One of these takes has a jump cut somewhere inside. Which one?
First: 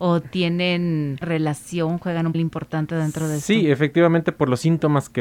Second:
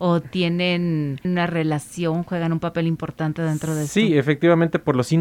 first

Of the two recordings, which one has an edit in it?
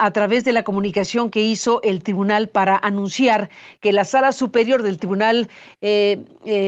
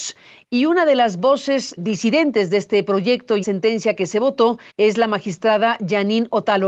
second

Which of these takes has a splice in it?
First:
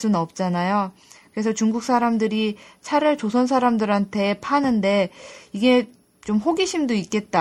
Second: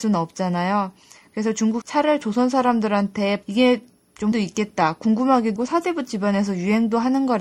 second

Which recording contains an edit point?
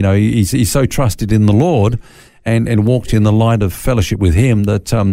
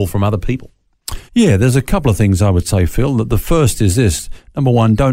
second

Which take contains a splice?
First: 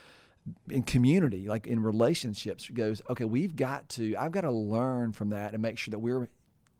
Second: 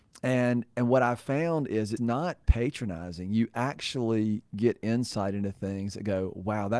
second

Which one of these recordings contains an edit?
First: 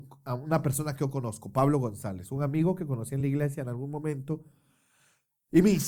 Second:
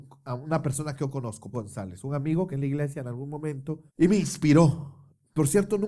second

